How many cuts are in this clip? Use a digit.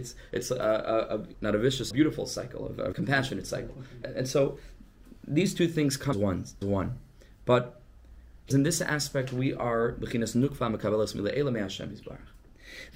7